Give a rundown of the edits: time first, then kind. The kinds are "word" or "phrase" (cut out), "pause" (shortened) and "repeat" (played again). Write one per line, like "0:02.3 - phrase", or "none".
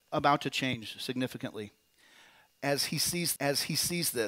0:03.4 - repeat